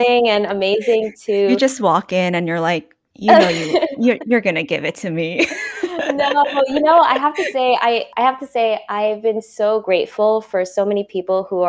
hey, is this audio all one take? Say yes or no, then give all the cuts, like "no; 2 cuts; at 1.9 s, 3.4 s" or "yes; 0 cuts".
yes; 0 cuts